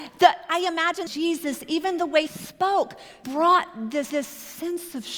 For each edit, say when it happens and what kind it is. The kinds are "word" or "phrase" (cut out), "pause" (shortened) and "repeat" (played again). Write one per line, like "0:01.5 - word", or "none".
0:01.1 - phrase
0:02.3 - word
0:03.2 - word
0:04.1 - repeat